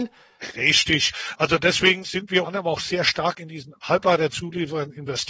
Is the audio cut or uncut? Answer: cut